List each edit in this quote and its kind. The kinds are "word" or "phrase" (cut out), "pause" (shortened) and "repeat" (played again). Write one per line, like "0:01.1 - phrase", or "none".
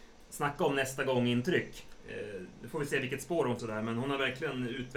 0:03.6 - phrase

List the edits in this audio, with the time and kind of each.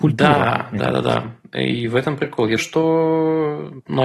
0:02.6 - word

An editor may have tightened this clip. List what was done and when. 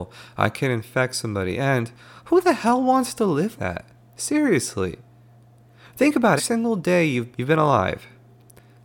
0:03.6 - word
0:06.4 - word
0:07.3 - word

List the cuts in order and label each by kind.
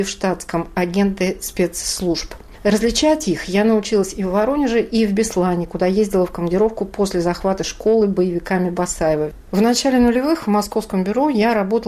none

